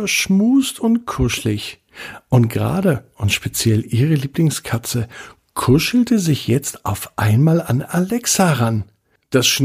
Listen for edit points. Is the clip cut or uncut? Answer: uncut